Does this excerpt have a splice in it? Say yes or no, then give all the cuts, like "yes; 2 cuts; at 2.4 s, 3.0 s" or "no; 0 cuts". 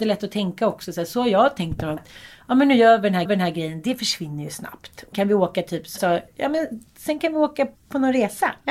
yes; 6 cuts; at 2.0 s, 3.3 s, 5.1 s, 6.0 s, 6.3 s, 7.8 s